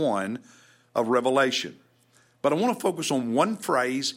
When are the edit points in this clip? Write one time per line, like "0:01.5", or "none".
none